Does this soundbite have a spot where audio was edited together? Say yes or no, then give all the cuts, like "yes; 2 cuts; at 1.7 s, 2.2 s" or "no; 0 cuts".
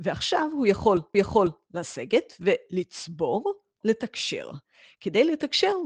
yes; 2 cuts; at 1.1 s, 3.8 s